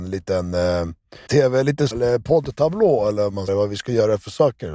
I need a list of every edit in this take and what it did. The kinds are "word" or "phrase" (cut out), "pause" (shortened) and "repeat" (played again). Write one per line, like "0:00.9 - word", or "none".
0:01.3 - word
0:01.9 - word
0:03.5 - phrase